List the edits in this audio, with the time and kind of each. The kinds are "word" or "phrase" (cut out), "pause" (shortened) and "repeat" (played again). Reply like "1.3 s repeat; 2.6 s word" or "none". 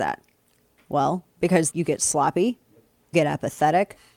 1.7 s word; 3.1 s word